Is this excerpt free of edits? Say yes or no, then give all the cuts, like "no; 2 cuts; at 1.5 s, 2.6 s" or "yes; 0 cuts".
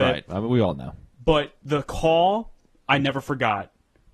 yes; 0 cuts